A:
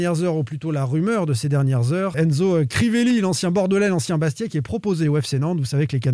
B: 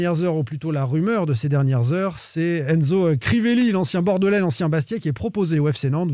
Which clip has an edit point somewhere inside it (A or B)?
A